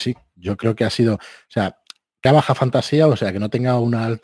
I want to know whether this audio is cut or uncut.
cut